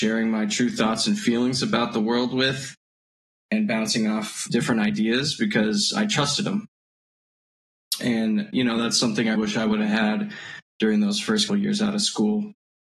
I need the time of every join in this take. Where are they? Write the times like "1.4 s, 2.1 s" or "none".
4.5 s, 9.3 s, 11.5 s